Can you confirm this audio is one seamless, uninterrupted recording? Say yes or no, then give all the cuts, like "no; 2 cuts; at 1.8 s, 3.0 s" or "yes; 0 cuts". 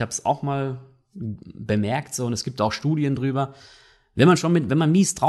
yes; 0 cuts